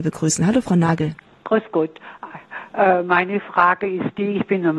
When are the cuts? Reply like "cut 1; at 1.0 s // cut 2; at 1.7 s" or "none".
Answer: none